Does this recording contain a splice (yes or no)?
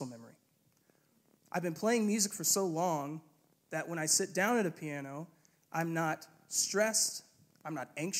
no